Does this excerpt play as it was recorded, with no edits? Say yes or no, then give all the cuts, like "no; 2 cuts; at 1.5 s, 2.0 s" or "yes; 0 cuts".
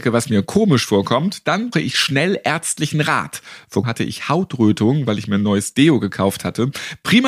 no; 2 cuts; at 1.7 s, 3.8 s